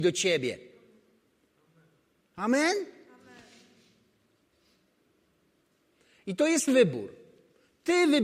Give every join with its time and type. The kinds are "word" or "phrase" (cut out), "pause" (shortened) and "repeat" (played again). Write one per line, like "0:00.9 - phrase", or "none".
0:06.7 - word

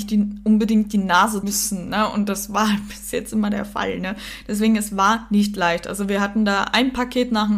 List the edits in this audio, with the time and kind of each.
0:01.4 - word

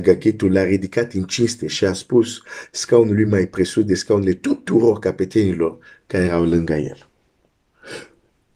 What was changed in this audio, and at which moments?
none

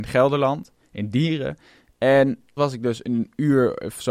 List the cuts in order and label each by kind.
0:02.6 - word

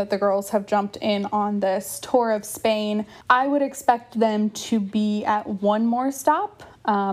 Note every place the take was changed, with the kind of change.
0:03.2 - pause

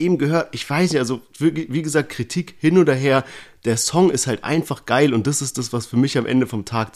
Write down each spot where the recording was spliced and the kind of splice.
none

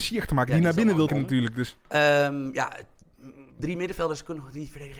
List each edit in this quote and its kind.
0:01.1 - word
0:01.8 - pause
0:03.6 - word

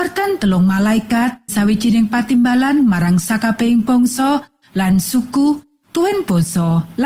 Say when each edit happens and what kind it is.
0:01.5 - word

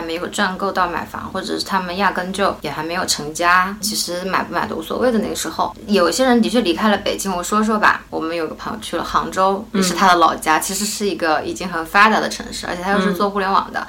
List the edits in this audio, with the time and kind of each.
0:03.8 - word

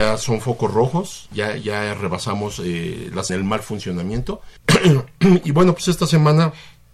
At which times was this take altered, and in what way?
0:01.3 - word
0:03.3 - phrase
0:04.6 - pause

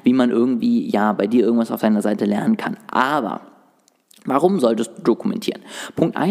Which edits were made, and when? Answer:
none

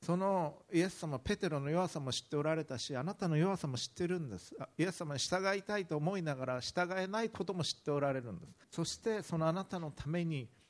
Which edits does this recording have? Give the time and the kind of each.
0:08.6 - pause

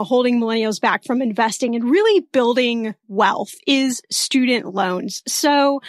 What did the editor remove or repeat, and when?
0:03.0 - pause

